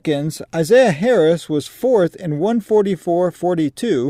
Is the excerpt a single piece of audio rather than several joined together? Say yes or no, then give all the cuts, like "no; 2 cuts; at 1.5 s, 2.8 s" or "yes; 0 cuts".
yes; 0 cuts